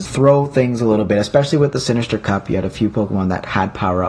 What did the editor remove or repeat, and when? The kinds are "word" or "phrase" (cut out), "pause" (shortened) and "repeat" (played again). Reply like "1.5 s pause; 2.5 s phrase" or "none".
none